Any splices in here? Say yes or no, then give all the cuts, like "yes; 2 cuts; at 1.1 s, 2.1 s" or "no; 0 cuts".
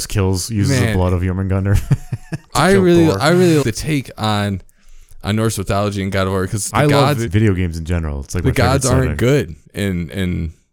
yes; 4 cuts; at 3.6 s, 6.7 s, 7.3 s, 9.6 s